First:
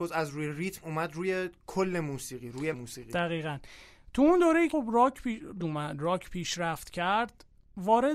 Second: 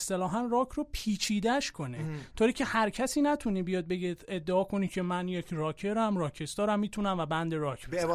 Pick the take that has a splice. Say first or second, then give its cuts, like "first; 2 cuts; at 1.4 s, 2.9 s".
first; 3 cuts; at 2.7 s, 4.7 s, 5.6 s